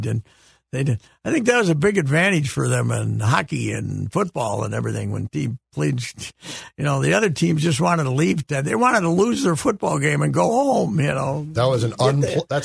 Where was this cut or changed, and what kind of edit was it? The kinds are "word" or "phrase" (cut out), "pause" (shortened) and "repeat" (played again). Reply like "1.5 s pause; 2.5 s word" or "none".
none

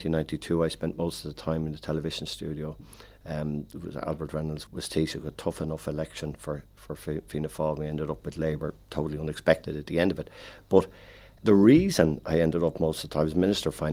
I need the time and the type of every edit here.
4.7 s word; 11.4 s word

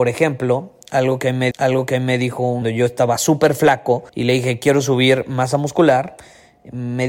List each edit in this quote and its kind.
1.5 s repeat; 2.6 s phrase; 4.1 s pause

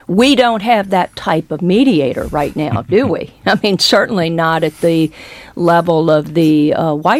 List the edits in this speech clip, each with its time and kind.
none

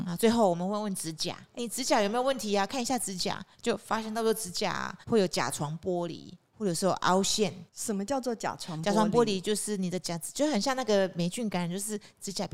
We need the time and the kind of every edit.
1.6 s word; 3.5 s pause; 5.0 s pause; 7.7 s pause

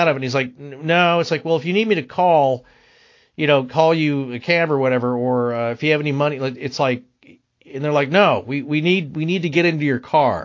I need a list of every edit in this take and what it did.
none

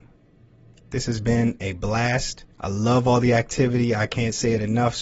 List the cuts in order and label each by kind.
2.5 s pause

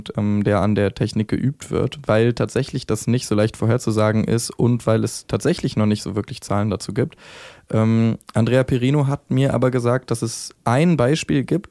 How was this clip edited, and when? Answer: 10.6 s pause

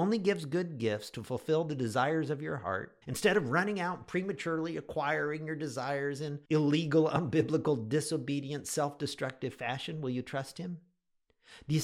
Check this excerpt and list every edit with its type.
3.0 s pause; 6.5 s pause

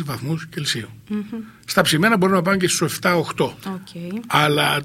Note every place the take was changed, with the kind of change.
1.0 s pause

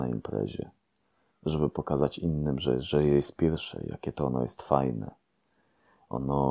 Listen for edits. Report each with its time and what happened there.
none

